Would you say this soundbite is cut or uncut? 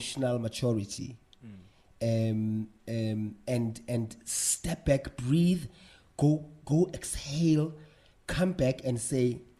uncut